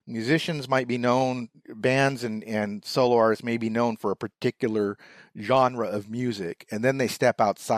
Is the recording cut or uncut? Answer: uncut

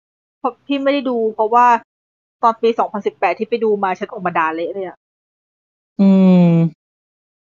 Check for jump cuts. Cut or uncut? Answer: uncut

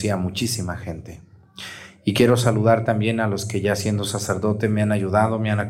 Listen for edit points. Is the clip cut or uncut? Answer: uncut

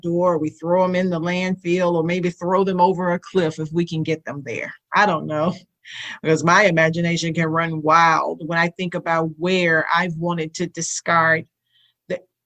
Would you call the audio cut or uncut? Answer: cut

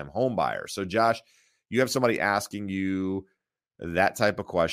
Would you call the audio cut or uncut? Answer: uncut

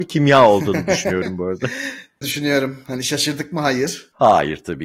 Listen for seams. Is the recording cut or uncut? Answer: cut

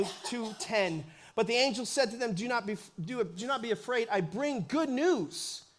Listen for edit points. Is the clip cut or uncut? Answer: uncut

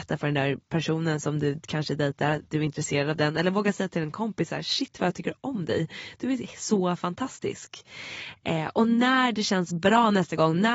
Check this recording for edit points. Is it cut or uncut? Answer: uncut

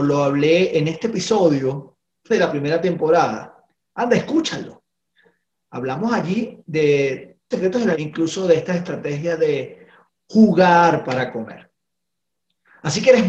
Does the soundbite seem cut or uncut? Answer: cut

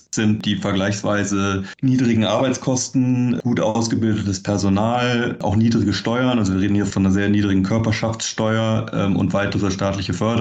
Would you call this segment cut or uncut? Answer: uncut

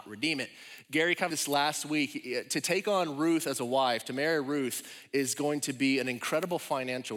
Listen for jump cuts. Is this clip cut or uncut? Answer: cut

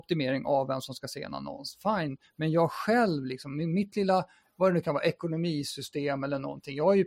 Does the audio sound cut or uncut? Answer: uncut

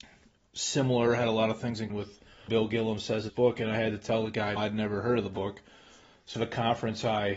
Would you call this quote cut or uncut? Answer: cut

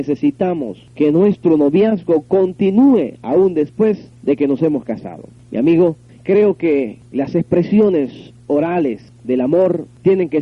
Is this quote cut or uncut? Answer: uncut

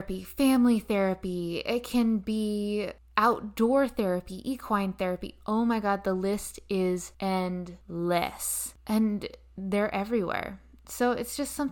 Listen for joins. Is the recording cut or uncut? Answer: uncut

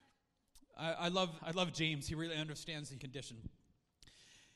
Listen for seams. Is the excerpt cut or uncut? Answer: cut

